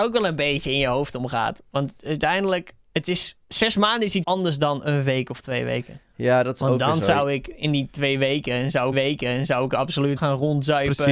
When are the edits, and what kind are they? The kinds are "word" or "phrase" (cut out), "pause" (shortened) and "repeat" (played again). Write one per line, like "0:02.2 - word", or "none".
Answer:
0:02.8 - pause
0:03.4 - pause
0:04.2 - word
0:08.9 - repeat
0:10.2 - word